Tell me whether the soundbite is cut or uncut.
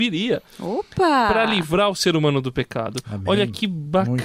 uncut